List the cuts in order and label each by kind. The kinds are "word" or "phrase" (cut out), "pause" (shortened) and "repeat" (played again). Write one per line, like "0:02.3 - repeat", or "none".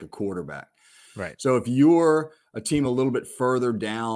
none